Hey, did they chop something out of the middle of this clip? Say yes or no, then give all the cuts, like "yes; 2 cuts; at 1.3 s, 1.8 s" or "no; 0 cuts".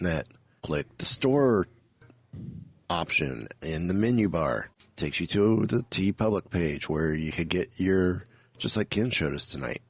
no; 0 cuts